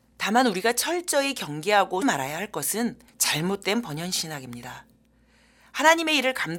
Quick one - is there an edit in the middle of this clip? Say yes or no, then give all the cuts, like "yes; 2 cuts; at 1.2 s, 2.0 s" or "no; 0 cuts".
yes; 2 cuts; at 2.0 s, 3.1 s